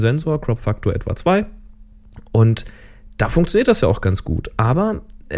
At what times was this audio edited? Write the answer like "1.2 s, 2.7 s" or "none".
none